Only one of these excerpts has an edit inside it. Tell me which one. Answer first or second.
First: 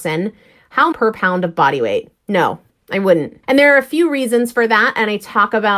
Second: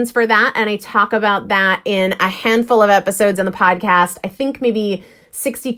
first